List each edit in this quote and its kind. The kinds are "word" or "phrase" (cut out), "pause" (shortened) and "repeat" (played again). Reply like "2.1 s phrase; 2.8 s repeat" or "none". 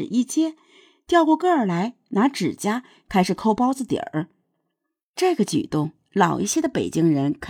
none

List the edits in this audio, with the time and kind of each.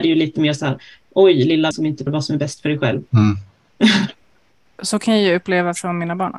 1.7 s word; 2.1 s word; 3.1 s pause

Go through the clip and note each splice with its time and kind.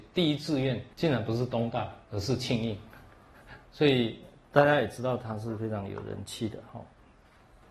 0.9 s pause; 2.0 s pause; 3.6 s word

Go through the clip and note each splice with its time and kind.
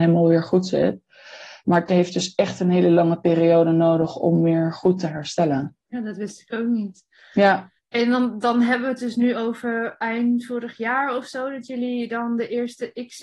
7.8 s pause

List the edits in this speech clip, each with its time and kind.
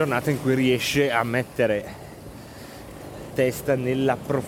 3.3 s word

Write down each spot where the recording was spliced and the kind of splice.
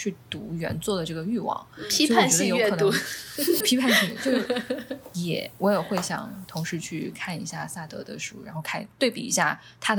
3.6 s word

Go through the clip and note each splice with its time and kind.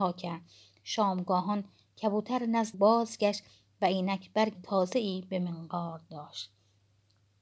2.7 s word; 4.5 s word

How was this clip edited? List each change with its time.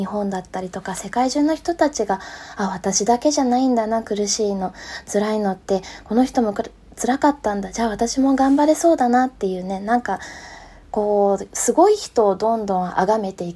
none

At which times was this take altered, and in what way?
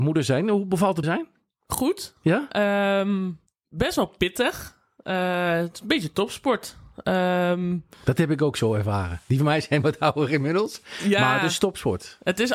1.0 s word; 3.5 s pause; 7.9 s pause

